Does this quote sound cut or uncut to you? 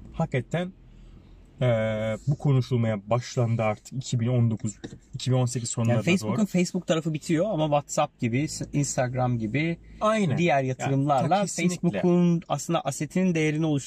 uncut